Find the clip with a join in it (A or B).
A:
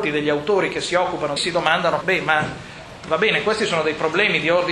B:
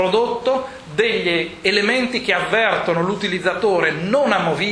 A